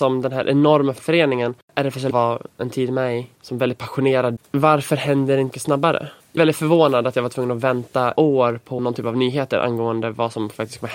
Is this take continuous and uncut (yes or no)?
no